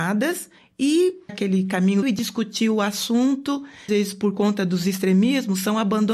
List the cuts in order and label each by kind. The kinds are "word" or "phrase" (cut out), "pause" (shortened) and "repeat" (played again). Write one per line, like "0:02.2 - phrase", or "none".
0:01.3 - phrase
0:02.0 - phrase
0:03.9 - phrase